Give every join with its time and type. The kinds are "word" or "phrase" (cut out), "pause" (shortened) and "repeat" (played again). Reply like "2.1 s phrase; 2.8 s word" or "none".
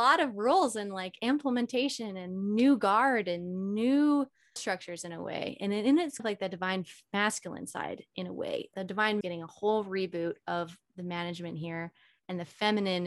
4.6 s word; 6.2 s word; 8.7 s word; 9.2 s word